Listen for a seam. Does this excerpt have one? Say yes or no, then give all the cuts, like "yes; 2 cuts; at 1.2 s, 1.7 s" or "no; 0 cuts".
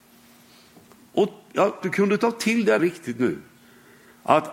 yes; 2 cuts; at 1.8 s, 2.8 s